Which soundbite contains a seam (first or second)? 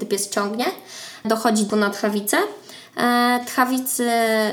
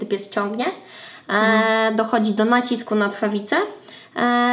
first